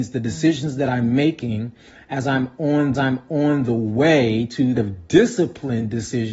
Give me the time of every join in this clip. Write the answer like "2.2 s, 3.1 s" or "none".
2.9 s, 4.8 s